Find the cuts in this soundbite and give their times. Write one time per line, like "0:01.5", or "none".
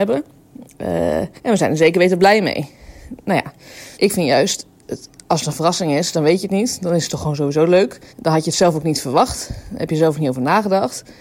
0:01.4
0:03.9
0:08.1